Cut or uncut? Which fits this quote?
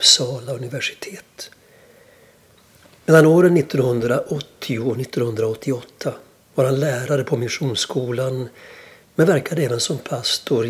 uncut